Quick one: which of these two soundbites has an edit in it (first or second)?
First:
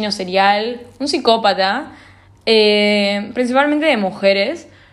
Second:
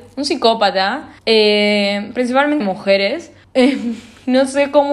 second